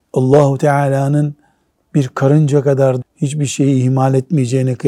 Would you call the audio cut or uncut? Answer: cut